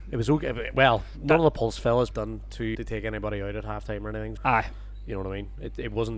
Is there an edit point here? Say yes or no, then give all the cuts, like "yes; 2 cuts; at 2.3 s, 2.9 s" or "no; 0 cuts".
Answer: yes; 3 cuts; at 2.1 s, 2.7 s, 4.4 s